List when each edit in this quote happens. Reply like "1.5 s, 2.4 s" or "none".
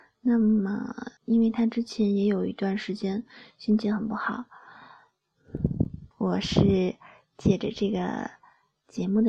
1.2 s, 6.1 s